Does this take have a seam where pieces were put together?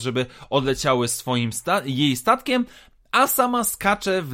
no; 0 cuts

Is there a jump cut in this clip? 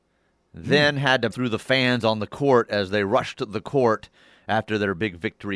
yes; 1 cut; at 1.3 s

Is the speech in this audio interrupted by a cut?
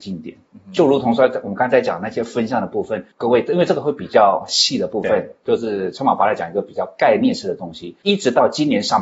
yes; 1 cut; at 3.1 s

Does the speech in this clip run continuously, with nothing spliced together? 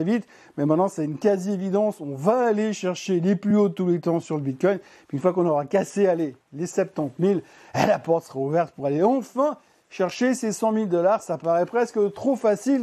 yes; 0 cuts

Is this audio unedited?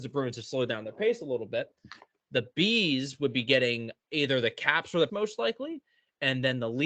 no; 1 cut; at 5.1 s

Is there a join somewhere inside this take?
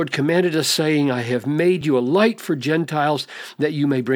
no; 0 cuts

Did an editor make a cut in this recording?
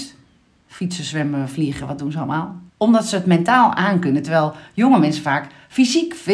yes; 1 cut; at 2.7 s

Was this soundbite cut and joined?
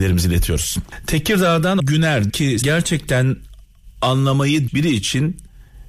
yes; 4 cuts; at 1.8 s, 2.3 s, 2.6 s, 4.7 s

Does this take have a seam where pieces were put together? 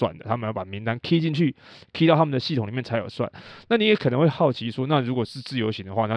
no; 0 cuts

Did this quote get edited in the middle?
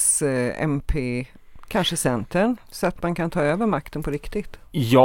no; 0 cuts

